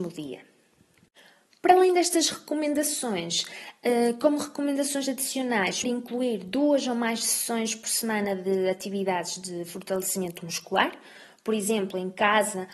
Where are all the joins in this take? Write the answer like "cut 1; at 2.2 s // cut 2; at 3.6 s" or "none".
cut 1; at 5.8 s